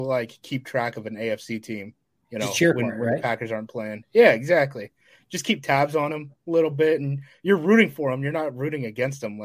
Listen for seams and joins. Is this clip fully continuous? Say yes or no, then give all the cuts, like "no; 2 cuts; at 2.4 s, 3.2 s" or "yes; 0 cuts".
yes; 0 cuts